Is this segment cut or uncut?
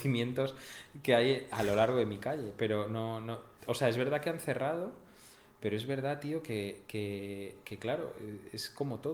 uncut